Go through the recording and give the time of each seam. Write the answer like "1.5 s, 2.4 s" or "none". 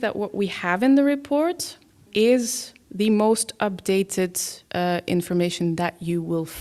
2.8 s, 4.7 s